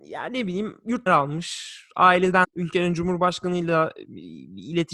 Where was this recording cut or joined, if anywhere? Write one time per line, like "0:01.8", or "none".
0:01.1
0:02.4

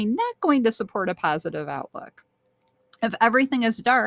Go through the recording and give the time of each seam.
none

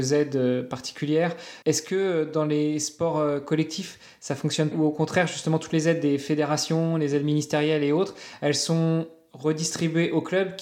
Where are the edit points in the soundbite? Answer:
0:01.6
0:04.7

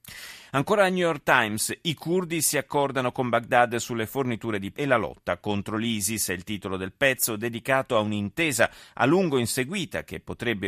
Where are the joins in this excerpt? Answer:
0:04.7

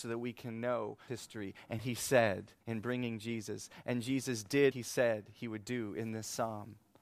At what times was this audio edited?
0:01.1
0:01.8
0:02.6
0:04.7

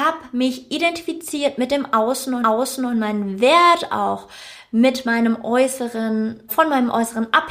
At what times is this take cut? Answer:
0:02.4
0:06.5

